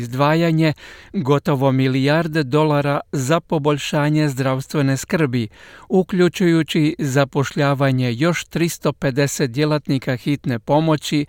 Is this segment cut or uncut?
uncut